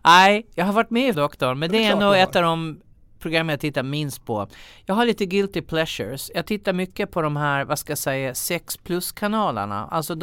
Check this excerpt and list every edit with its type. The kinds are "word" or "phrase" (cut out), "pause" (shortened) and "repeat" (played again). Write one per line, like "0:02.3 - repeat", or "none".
0:01.1 - word